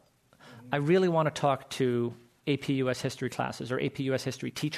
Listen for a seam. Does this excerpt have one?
no; 0 cuts

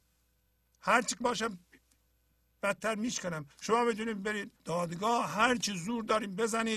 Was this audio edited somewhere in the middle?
yes; 3 cuts; at 1.2 s, 3.5 s, 4.6 s

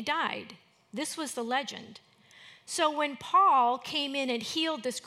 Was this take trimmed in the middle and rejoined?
no; 0 cuts

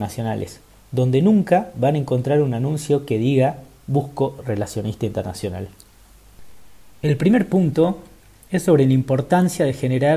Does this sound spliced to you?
no; 0 cuts

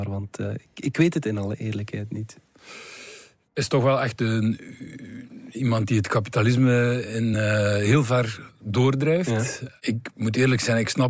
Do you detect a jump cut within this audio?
no; 0 cuts

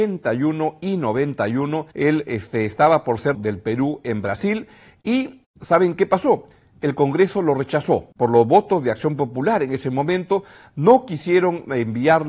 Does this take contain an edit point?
yes; 3 cuts; at 1.9 s, 3.3 s, 8.1 s

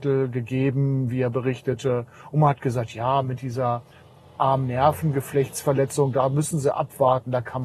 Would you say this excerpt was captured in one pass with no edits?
yes; 0 cuts

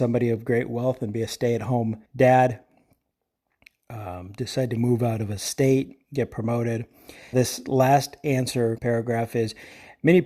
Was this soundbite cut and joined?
yes; 4 cuts; at 2.1 s, 6.0 s, 7.3 s, 8.8 s

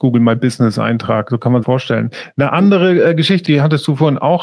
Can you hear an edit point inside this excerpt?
yes; 1 cut; at 1.6 s

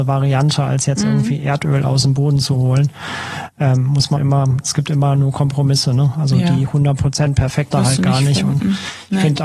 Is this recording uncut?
no; 2 cuts; at 4.2 s, 7.7 s

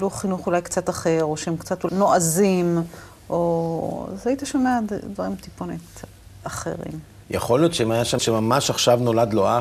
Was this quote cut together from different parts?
yes; 2 cuts; at 1.9 s, 8.2 s

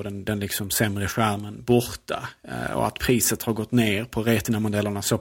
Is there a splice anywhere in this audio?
no; 0 cuts

